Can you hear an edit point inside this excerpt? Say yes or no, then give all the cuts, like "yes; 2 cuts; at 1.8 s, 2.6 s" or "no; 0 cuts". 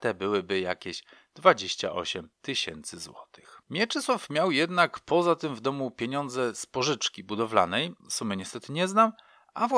yes; 2 cuts; at 2.3 s, 8.0 s